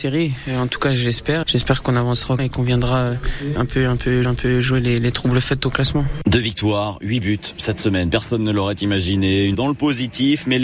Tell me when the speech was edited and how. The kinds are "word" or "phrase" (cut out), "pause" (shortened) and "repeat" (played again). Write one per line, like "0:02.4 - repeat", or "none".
0:01.4 - word
0:02.4 - word
0:03.6 - word
0:04.2 - repeat
0:09.5 - phrase